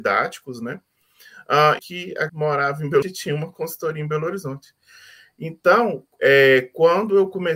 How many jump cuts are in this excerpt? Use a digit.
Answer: 3